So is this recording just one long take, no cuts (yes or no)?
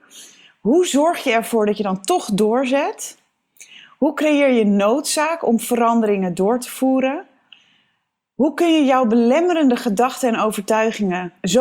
yes